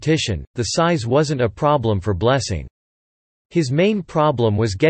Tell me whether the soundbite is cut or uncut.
uncut